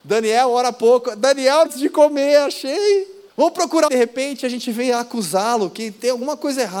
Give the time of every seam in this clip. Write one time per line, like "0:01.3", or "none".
0:01.7
0:03.3
0:03.9

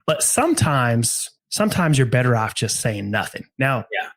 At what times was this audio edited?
0:01.4

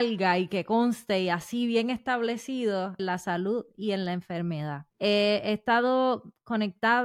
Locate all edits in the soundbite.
0:03.0
0:04.9

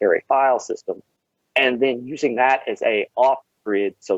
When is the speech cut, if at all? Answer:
0:01.2

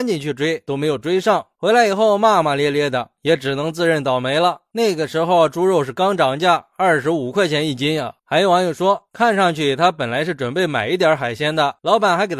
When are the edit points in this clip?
0:08.2

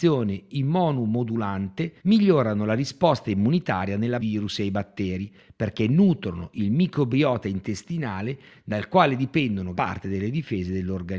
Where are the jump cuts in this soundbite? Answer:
0:02.0
0:04.2
0:09.7

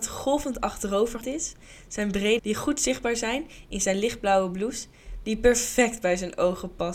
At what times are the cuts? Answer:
0:01.2
0:02.4

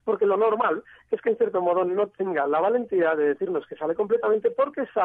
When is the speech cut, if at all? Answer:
none

